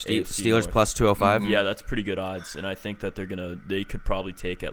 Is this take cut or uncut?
uncut